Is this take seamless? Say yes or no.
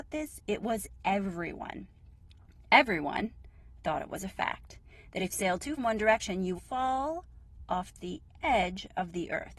no